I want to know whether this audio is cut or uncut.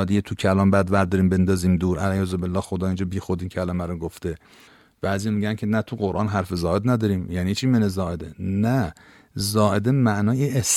uncut